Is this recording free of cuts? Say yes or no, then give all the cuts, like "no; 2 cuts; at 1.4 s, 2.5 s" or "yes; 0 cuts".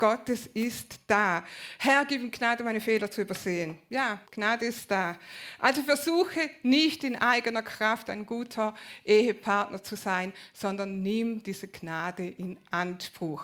no; 1 cut; at 4.3 s